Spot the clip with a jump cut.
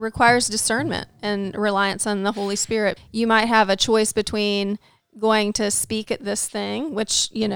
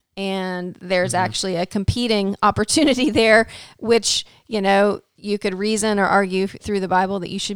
first; 1 cut; at 3.0 s

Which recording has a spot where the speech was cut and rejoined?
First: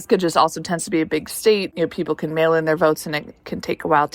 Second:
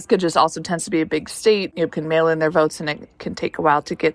second; 1 cut; at 1.9 s

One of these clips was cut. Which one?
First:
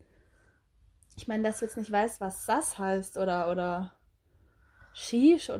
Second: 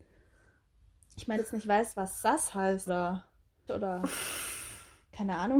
second; 3 cuts; at 1.4 s, 2.9 s, 3.7 s

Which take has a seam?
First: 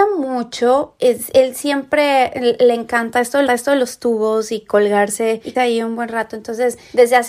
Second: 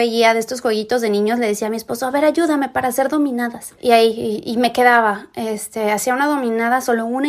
first; 2 cuts; at 3.5 s, 5.5 s

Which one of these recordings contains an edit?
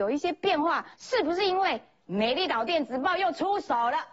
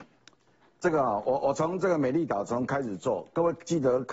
first; 1 cut; at 0.9 s

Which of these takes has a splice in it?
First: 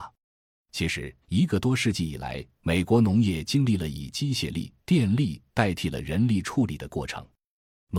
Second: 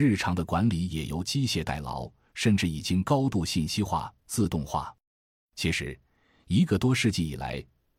first; 3 cuts; at 1.2 s, 2.5 s, 4.8 s

